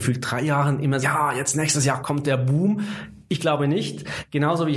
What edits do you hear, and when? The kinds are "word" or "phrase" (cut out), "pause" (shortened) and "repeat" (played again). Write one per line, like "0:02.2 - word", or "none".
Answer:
0:01.0 - word
0:02.0 - word